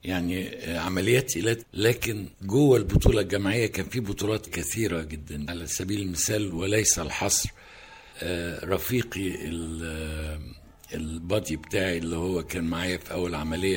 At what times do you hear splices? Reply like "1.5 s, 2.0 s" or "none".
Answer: 1.6 s, 2.3 s, 4.5 s, 5.5 s, 8.1 s